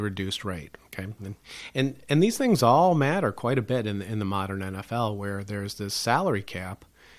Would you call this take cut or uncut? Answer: uncut